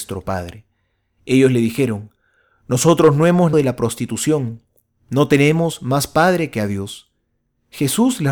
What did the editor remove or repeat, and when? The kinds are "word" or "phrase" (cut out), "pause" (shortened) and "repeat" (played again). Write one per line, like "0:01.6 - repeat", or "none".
0:03.5 - word